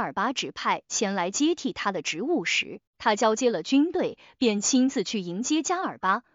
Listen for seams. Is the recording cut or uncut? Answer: cut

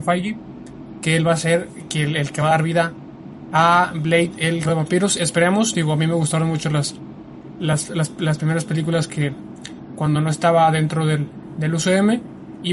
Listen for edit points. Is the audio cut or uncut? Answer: cut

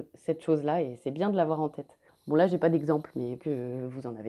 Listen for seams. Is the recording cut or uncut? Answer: cut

